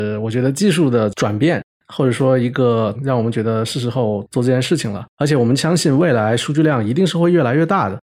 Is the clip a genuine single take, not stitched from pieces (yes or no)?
no